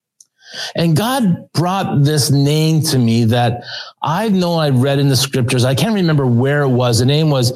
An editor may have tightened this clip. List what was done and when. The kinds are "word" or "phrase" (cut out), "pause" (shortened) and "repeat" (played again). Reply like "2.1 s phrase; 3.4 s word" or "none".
none